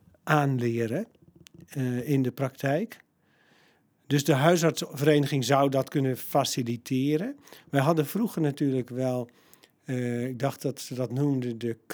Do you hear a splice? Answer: no; 0 cuts

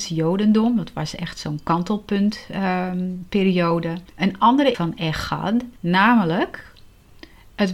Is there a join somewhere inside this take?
yes; 3 cuts; at 4.1 s, 4.7 s, 5.8 s

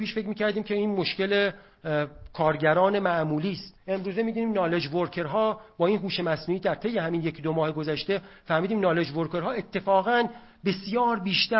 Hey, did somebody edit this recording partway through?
yes; 1 cut; at 3.8 s

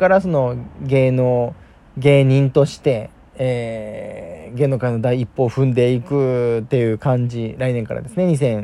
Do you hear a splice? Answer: yes; 1 cut; at 1.6 s

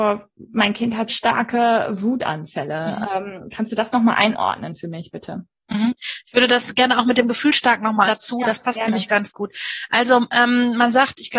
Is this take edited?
yes; 2 cuts; at 1.1 s, 8.1 s

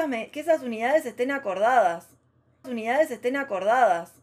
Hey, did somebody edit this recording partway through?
yes; 1 cut; at 2.6 s

